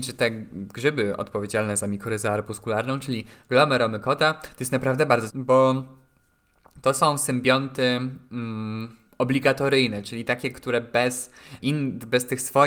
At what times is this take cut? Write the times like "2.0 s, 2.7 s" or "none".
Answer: 5.3 s, 9.1 s, 11.6 s